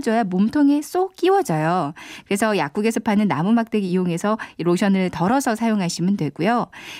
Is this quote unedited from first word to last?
yes; 0 cuts

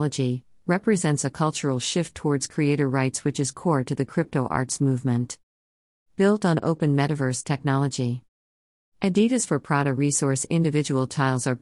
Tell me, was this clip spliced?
no; 0 cuts

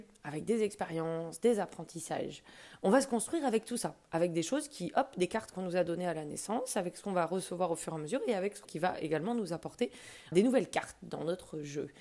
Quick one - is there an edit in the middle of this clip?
yes; 3 cuts; at 5.5 s, 8.6 s, 10.3 s

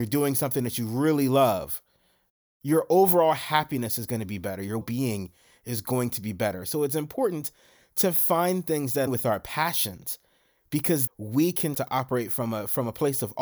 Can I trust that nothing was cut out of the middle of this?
no; 4 cuts; at 4.8 s, 9.1 s, 11.1 s, 11.7 s

